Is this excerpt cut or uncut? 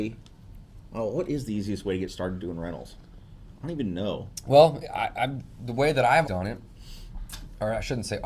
cut